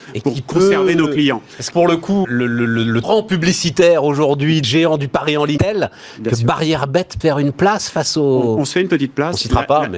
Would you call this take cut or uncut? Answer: cut